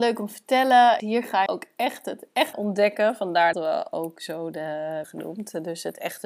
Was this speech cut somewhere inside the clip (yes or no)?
yes